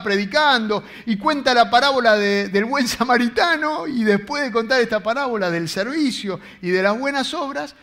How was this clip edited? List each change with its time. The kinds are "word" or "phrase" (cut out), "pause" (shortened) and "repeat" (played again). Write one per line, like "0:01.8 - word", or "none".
none